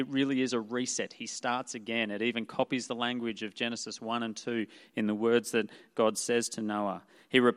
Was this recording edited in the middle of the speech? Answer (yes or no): no